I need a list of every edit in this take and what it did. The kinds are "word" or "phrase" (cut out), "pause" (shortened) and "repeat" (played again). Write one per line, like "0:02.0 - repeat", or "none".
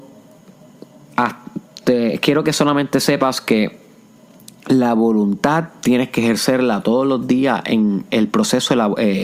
none